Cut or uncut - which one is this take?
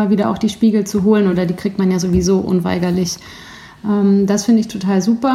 uncut